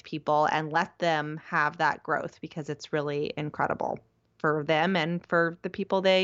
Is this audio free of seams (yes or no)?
yes